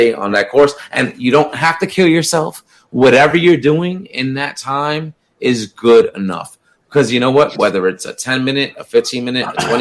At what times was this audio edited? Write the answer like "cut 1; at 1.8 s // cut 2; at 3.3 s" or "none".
none

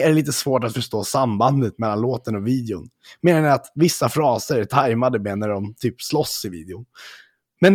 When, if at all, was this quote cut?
none

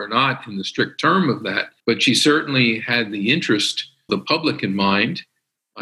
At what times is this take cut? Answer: cut 1; at 1.8 s // cut 2; at 4.1 s

